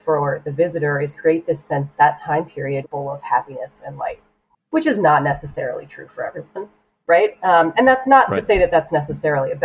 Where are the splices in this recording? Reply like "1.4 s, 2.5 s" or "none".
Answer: 2.0 s, 2.8 s